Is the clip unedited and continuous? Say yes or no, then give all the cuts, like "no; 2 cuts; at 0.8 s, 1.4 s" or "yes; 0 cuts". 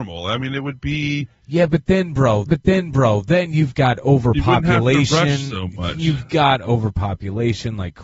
no; 1 cut; at 2.5 s